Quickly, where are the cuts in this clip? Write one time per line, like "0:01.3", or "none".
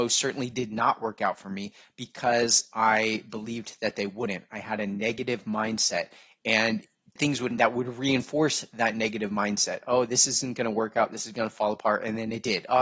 0:07.2
0:07.5